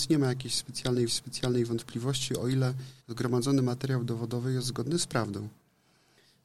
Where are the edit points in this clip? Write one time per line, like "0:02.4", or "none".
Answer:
0:01.1
0:03.0